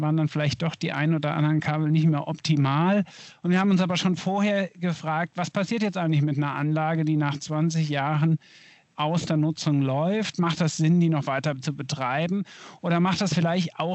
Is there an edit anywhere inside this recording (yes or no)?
no